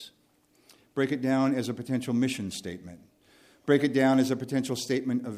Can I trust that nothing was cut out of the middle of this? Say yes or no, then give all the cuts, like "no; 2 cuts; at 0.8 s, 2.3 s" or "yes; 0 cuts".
yes; 0 cuts